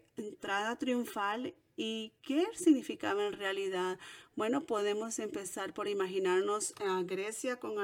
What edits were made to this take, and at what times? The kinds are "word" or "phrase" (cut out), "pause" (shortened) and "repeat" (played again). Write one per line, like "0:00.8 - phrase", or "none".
none